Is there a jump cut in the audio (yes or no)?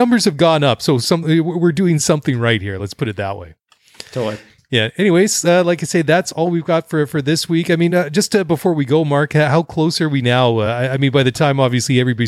no